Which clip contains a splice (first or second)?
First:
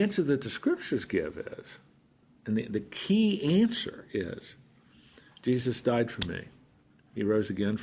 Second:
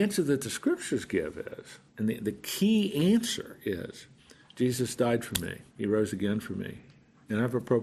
second